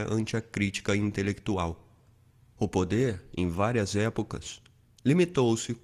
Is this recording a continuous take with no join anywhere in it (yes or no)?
yes